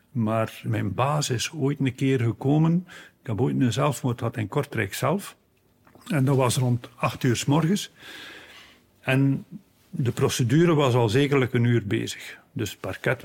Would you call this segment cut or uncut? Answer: uncut